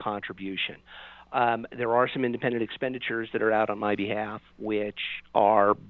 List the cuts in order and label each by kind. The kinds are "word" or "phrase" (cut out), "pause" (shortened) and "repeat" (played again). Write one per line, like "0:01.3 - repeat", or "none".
none